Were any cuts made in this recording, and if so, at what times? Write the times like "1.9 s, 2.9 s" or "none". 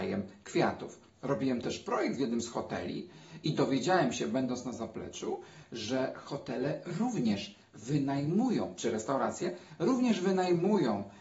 1.1 s